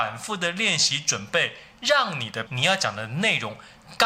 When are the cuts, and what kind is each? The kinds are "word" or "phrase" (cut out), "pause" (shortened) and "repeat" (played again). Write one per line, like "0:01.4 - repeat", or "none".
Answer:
0:02.5 - word